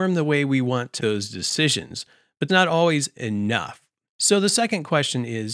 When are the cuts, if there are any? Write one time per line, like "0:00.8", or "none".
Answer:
0:01.0
0:02.5